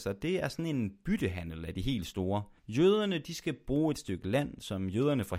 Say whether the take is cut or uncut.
cut